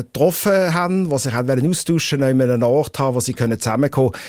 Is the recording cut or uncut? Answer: uncut